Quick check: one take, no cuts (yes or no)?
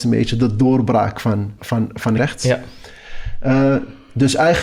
no